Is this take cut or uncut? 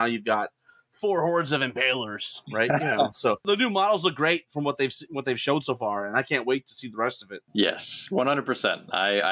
uncut